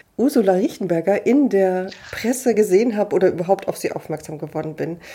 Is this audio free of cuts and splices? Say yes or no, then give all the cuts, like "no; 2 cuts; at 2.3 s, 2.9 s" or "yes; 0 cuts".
yes; 0 cuts